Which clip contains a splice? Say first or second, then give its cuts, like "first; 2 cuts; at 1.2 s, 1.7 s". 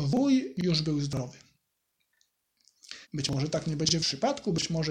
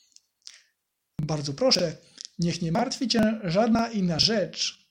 first; 2 cuts; at 3.0 s, 4.0 s